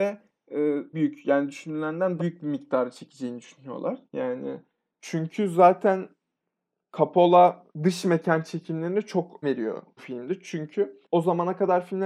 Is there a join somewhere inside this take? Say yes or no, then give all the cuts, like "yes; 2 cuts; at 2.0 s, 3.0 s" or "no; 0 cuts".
yes; 7 cuts; at 0.9 s, 2.2 s, 4.1 s, 7.7 s, 9.4 s, 10.0 s, 11.0 s